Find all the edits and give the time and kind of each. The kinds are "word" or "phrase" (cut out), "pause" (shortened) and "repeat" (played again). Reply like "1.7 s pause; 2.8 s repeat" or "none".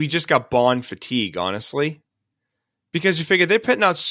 none